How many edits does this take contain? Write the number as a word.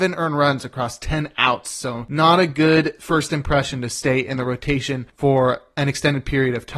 zero